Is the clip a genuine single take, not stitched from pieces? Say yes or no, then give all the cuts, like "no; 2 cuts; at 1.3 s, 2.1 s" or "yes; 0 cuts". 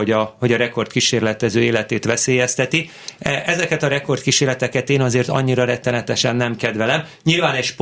yes; 0 cuts